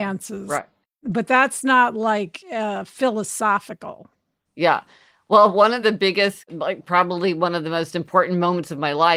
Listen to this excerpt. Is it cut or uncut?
uncut